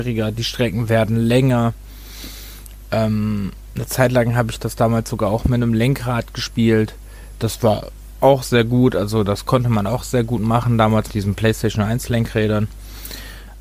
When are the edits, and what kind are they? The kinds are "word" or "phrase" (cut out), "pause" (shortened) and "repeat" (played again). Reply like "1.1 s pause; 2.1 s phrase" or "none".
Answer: 11.1 s word